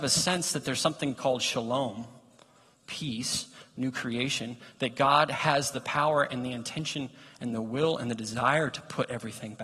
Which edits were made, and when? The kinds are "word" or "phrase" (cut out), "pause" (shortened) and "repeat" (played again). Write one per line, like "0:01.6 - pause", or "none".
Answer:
none